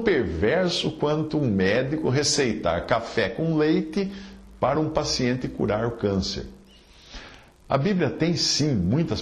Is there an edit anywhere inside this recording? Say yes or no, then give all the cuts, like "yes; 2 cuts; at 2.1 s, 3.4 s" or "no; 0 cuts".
no; 0 cuts